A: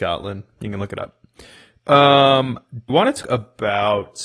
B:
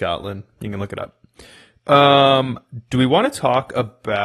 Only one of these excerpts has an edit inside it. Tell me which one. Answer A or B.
A